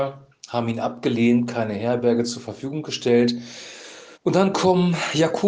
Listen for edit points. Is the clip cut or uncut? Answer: cut